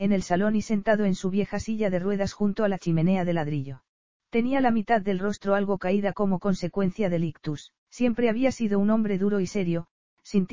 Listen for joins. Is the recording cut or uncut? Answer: cut